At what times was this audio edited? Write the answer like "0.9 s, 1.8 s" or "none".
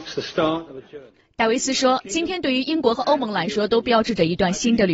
none